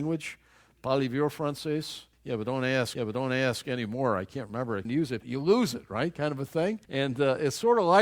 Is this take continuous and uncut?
no; 5 cuts; at 2.1 s, 2.9 s, 4.8 s, 5.2 s, 6.8 s

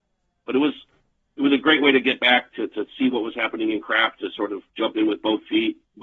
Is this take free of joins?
no; 1 cut; at 4.7 s

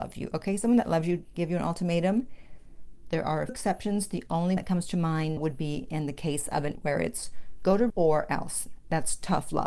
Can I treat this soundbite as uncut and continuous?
no; 6 cuts; at 1.3 s, 3.5 s, 4.6 s, 5.4 s, 6.7 s, 7.9 s

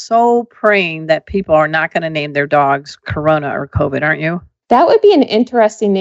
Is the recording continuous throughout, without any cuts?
yes; 0 cuts

